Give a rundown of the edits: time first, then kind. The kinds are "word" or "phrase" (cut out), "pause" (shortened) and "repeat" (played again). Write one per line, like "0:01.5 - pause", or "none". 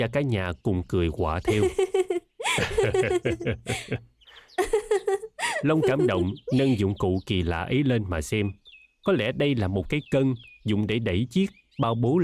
none